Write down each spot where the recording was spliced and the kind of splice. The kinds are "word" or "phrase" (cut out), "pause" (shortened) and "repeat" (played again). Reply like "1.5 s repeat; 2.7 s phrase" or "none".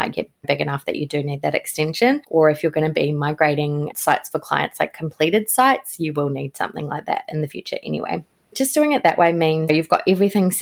none